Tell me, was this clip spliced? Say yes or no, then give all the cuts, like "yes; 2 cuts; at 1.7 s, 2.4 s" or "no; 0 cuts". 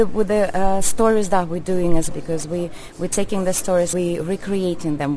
yes; 2 cuts; at 2.1 s, 3.9 s